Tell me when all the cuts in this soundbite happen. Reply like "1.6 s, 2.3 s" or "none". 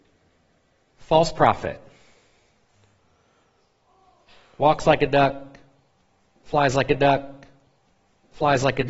6.9 s